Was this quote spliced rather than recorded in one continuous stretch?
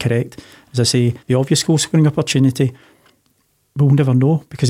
yes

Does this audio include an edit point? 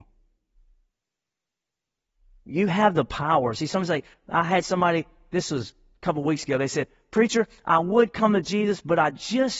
no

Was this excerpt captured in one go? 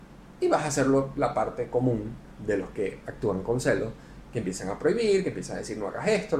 yes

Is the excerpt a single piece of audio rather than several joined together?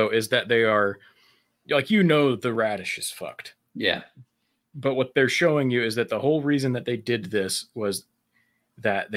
yes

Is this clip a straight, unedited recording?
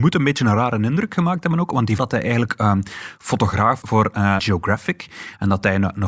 no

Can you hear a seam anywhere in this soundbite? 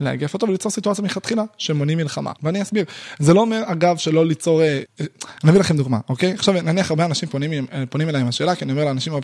yes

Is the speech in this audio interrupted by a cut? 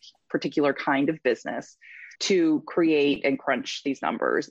yes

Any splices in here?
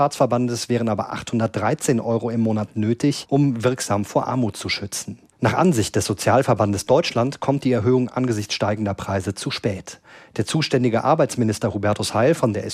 no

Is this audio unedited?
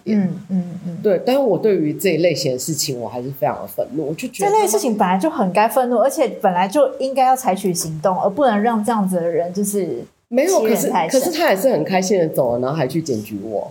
yes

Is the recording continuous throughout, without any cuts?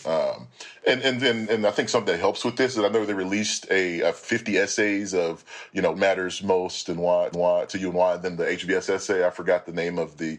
no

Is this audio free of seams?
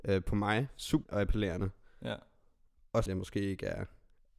no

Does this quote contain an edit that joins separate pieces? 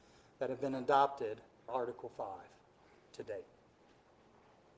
yes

